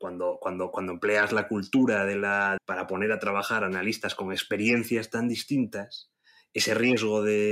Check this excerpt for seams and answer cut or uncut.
cut